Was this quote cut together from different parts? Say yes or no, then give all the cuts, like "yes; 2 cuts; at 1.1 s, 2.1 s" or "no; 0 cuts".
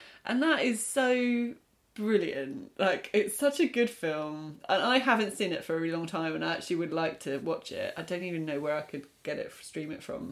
no; 0 cuts